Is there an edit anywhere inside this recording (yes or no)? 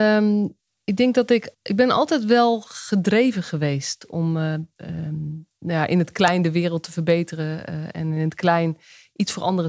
yes